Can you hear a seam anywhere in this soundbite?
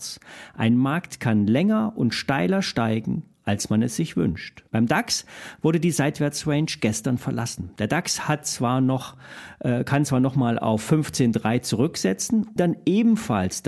yes; 3 cuts; at 3.3 s, 4.7 s, 12.6 s

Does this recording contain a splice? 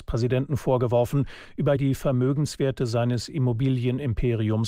yes; 1 cut; at 1.8 s

